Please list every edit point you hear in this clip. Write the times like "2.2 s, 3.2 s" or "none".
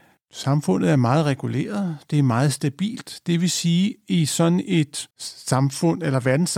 5.1 s